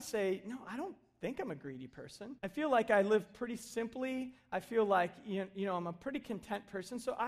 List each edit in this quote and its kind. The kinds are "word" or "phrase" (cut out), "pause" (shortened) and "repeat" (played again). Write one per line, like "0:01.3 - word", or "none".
0:02.4 - pause